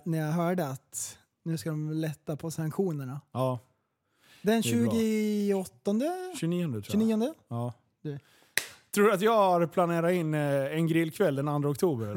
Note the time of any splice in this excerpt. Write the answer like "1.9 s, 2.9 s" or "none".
none